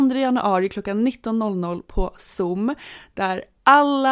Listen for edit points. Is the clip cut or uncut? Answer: uncut